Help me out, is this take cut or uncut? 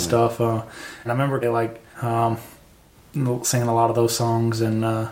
cut